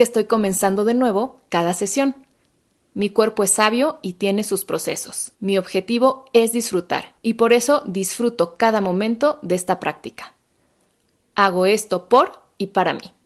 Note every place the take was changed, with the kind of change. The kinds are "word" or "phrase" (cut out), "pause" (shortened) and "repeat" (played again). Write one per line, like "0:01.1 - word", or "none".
0:05.3 - pause
0:07.2 - pause